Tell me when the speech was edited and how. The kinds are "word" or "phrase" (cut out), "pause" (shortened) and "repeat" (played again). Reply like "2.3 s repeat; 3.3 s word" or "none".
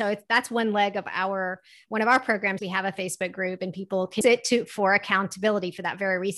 2.6 s word; 4.2 s word

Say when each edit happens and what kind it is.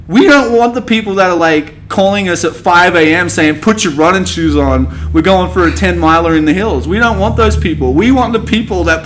none

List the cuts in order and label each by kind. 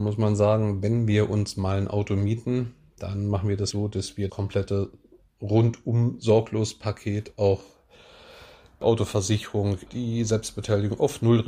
3.7 s word; 4.3 s word; 8.8 s word; 9.9 s word

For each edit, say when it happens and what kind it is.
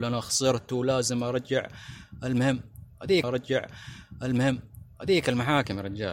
3.2 s repeat

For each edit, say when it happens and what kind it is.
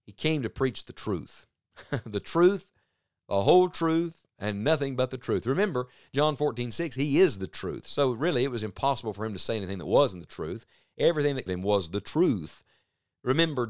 11.5 s phrase

